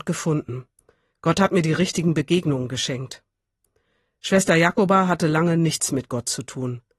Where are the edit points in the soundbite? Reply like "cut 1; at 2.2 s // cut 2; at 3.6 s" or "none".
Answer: none